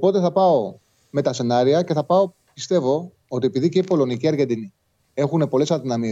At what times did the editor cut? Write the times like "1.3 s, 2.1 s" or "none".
none